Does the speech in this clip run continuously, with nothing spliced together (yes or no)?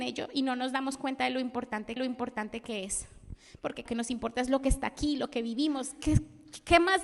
no